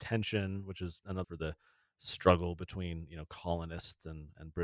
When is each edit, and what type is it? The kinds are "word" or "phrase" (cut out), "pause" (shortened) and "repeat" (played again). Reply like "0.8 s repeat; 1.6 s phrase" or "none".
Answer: 1.2 s word